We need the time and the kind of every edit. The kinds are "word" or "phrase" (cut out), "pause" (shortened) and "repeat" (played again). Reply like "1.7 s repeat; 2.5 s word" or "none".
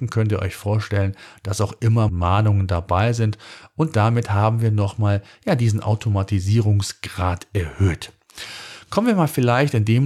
2.1 s phrase